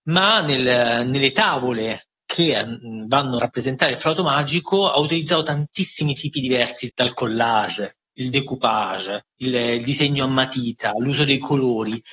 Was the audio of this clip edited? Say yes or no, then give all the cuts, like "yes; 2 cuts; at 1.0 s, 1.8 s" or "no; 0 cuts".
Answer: yes; 3 cuts; at 3.4 s, 6.9 s, 9.3 s